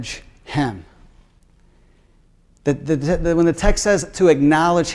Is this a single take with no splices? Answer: yes; 0 cuts

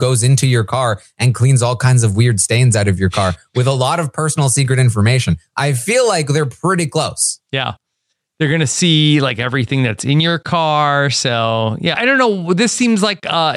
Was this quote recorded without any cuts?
no; 1 cut; at 11.9 s

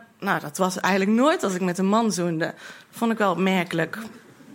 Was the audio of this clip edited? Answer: no; 0 cuts

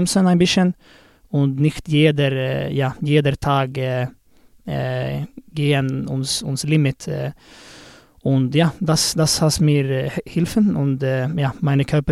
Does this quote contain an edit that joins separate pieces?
no; 0 cuts

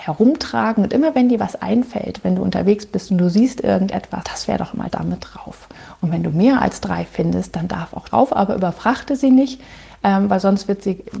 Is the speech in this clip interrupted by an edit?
yes; 3 cuts; at 4.2 s, 4.9 s, 8.1 s

